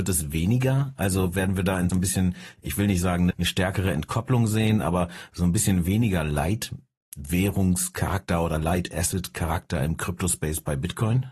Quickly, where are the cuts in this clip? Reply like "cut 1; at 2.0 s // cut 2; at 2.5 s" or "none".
cut 1; at 1.9 s // cut 2; at 3.3 s